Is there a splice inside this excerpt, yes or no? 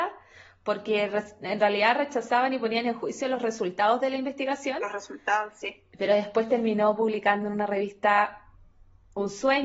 no